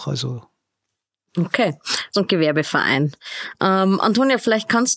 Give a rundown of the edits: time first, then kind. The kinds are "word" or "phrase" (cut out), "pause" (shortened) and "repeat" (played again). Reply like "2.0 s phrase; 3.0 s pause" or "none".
2.1 s phrase